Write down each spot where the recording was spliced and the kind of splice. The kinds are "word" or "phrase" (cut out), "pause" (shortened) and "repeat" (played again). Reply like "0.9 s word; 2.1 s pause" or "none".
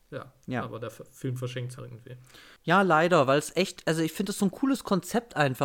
1.8 s phrase